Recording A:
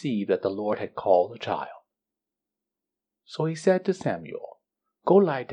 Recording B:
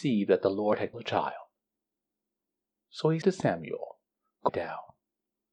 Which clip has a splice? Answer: B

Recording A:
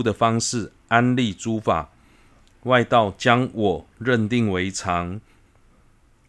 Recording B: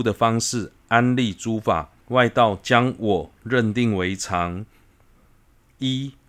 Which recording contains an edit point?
B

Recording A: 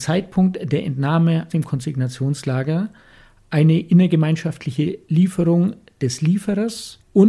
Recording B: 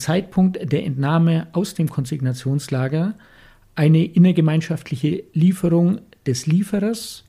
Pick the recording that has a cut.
A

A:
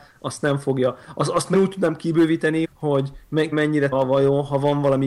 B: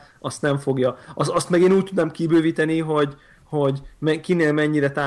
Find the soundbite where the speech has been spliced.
A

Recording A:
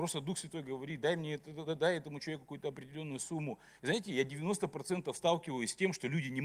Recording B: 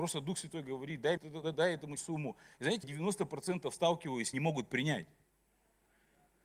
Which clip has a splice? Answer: B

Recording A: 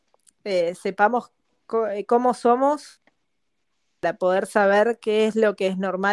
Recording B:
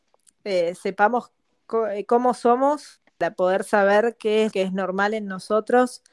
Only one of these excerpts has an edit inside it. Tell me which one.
B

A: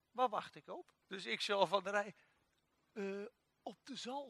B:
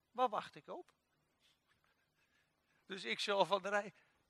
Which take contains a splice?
A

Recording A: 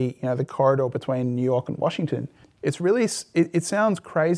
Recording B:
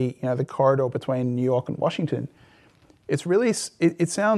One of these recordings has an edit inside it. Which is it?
A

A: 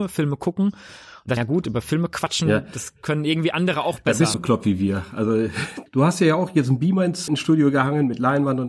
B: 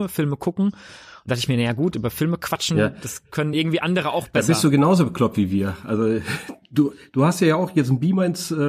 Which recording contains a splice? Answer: A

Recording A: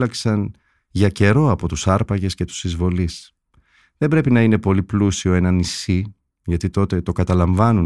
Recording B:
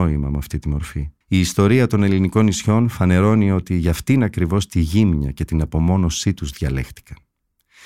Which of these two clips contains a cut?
B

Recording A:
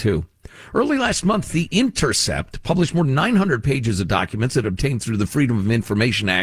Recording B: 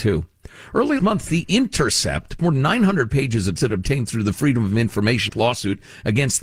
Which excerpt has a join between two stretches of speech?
B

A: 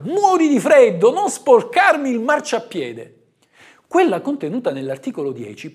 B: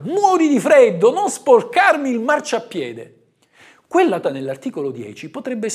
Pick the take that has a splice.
B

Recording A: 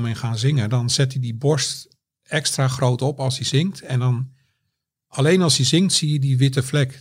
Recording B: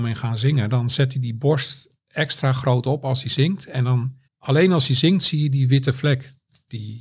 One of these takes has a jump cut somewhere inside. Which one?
B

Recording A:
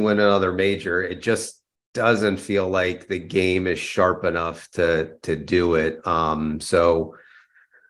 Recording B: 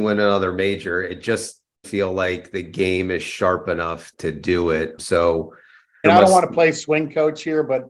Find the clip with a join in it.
B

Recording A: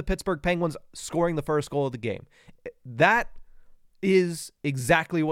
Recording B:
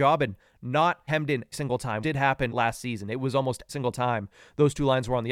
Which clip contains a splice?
B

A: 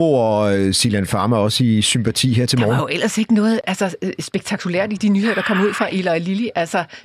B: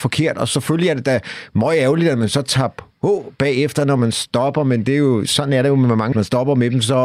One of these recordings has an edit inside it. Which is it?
B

